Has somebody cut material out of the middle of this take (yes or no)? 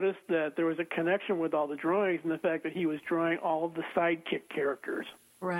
no